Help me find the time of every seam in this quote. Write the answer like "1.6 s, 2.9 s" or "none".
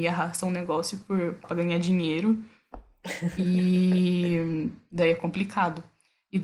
1.4 s